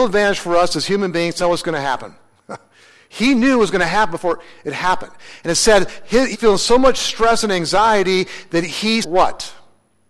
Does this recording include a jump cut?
yes; 3 cuts; at 1.4 s, 6.3 s, 9.0 s

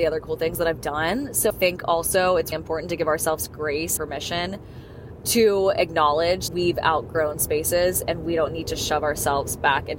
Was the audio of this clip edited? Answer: yes; 5 cuts; at 1.5 s, 2.5 s, 4.0 s, 6.5 s, 7.3 s

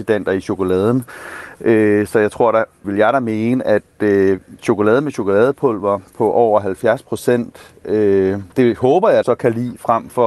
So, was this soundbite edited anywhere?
yes; 4 cuts; at 2.8 s, 4.6 s, 8.5 s, 9.2 s

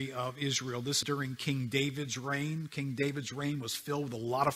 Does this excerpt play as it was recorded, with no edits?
no; 1 cut; at 1.0 s

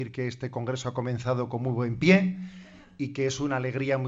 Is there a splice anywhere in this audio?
no; 0 cuts

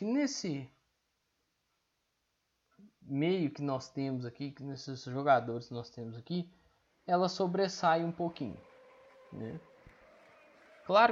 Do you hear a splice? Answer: no; 0 cuts

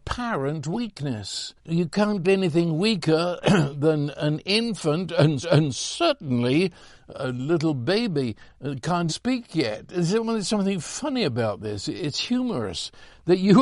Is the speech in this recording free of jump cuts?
no; 5 cuts; at 1.6 s, 2.2 s, 5.4 s, 7.1 s, 9.1 s

